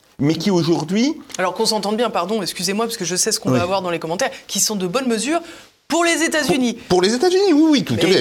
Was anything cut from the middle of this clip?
no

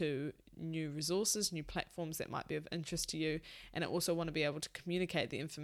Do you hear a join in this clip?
no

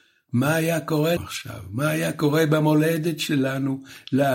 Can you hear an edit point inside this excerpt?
yes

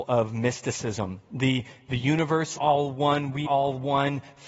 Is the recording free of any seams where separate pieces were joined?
no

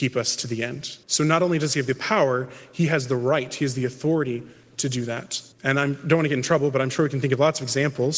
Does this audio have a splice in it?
yes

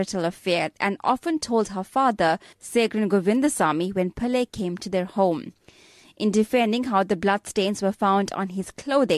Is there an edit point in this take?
no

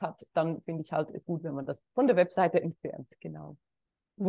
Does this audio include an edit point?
yes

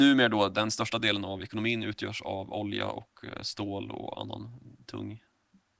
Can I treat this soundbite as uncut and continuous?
yes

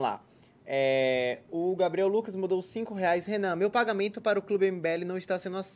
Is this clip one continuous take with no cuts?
yes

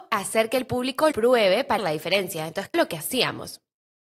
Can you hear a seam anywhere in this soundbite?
yes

